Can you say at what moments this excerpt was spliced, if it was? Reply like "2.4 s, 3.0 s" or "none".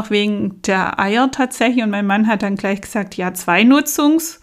none